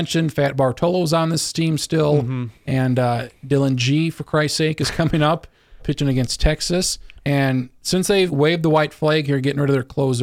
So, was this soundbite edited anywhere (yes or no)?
yes